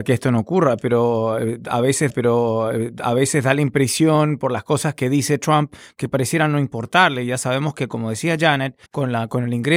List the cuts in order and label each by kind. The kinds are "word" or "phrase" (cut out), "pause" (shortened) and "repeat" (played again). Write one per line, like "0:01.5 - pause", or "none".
0:02.1 - repeat
0:08.9 - pause